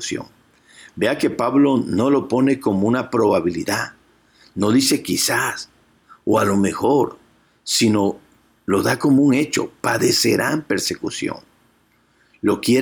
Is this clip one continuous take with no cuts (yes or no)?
yes